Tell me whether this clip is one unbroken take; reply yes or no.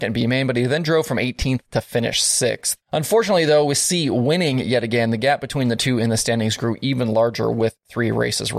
no